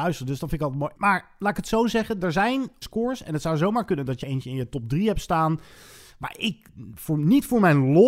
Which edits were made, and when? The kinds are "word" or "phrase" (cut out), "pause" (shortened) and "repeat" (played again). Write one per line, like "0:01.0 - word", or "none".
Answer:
0:02.8 - word
0:04.2 - word